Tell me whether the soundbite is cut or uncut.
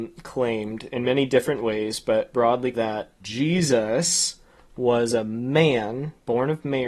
cut